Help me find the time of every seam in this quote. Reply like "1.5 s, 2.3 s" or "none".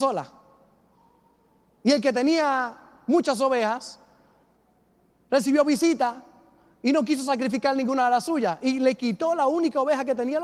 none